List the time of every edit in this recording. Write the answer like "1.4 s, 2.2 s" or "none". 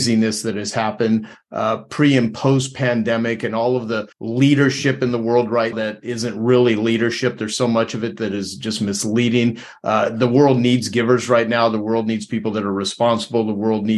4.1 s, 5.7 s

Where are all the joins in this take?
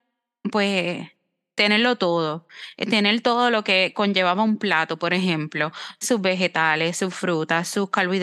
none

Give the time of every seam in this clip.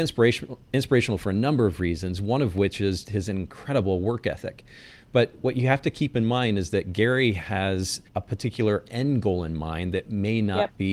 3.0 s, 8.1 s

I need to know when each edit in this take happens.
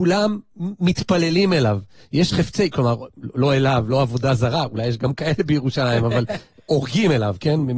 none

